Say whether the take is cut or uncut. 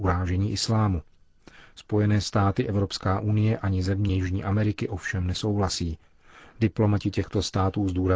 uncut